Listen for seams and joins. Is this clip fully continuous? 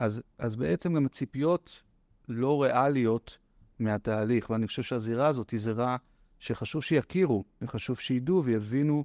yes; 0 cuts

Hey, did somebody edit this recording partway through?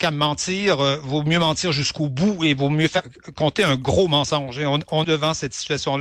yes; 1 cut; at 5.0 s

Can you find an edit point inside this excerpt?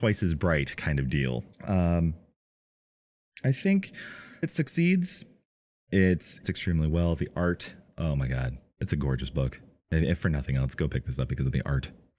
yes; 3 cuts; at 1.5 s, 4.4 s, 6.4 s

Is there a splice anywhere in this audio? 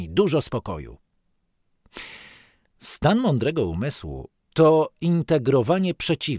no; 0 cuts

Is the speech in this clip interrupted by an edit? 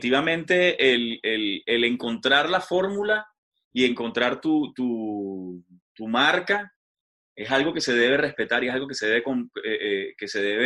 no; 0 cuts

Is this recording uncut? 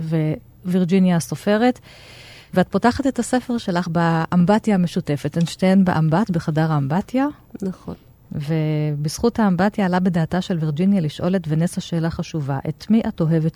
yes; 0 cuts

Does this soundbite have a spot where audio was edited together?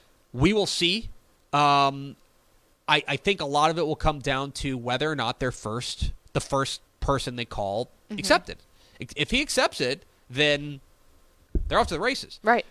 no; 0 cuts

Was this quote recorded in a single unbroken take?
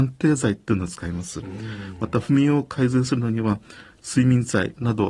yes; 0 cuts

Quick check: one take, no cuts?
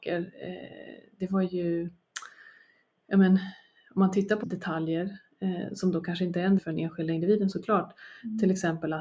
no; 2 cuts; at 4.4 s, 6.6 s

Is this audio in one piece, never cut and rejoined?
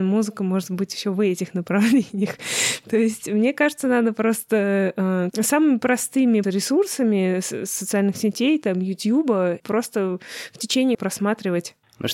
no; 4 cuts; at 5.3 s, 6.4 s, 9.6 s, 10.9 s

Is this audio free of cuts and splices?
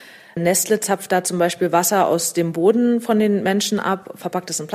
yes; 0 cuts

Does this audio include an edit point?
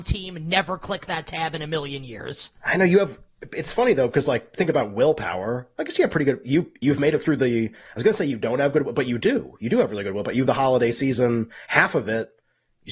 yes; 2 cuts; at 2.6 s, 10.5 s

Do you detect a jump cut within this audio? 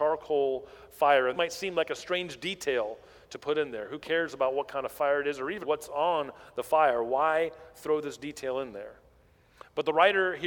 yes; 2 cuts; at 1.3 s, 5.6 s

